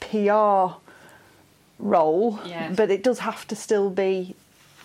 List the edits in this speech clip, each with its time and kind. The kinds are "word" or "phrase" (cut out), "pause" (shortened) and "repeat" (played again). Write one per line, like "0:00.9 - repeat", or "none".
none

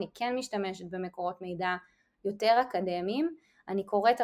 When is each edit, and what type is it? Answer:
none

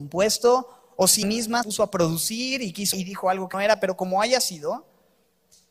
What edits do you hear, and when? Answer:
0:01.2 - word
0:01.6 - word
0:02.9 - word
0:03.5 - word

